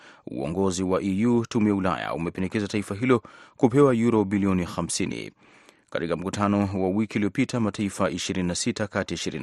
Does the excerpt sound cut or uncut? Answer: uncut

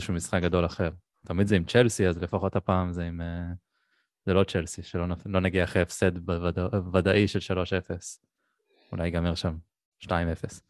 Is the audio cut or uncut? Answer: uncut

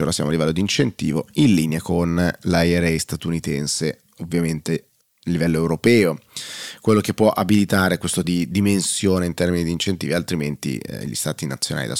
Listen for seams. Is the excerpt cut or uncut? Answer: cut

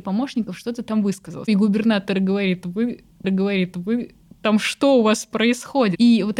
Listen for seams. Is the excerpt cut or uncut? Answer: cut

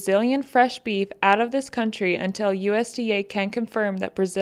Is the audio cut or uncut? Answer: uncut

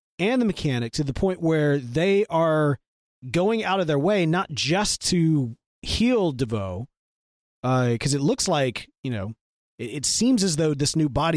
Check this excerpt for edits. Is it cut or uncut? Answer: uncut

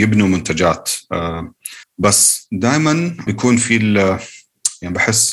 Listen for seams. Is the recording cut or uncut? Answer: cut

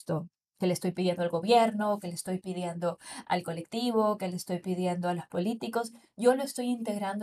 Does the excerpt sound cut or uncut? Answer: uncut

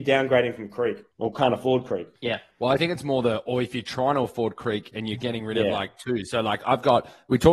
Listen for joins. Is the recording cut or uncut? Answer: cut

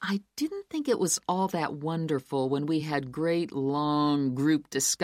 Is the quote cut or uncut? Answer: uncut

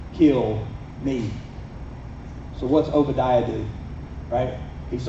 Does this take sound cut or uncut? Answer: uncut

